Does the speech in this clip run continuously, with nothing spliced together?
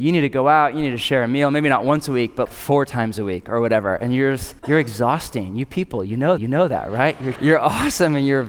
no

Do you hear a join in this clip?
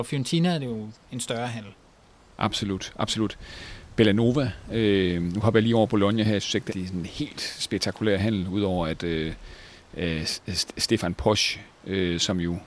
yes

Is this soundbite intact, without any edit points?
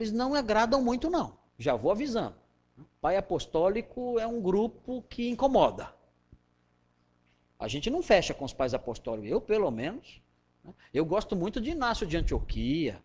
no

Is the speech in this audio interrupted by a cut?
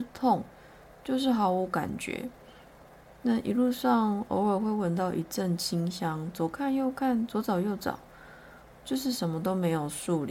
no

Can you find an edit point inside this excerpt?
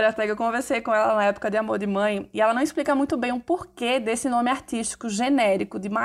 no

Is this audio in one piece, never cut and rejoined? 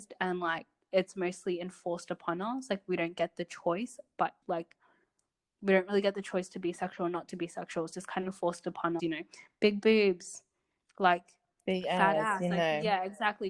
no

